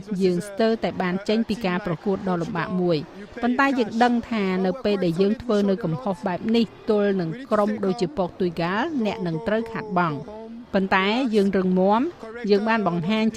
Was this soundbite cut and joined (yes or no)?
no